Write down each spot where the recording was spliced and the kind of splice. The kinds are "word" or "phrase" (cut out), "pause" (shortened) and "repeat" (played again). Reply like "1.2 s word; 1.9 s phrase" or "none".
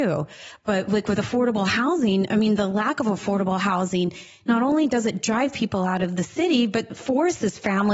6.9 s word